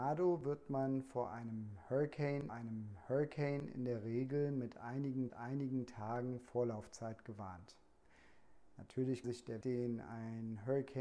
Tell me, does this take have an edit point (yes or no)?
yes